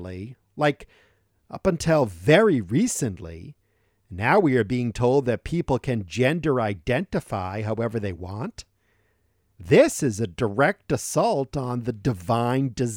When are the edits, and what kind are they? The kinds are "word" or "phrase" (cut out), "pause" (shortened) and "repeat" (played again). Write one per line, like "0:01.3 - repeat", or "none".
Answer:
none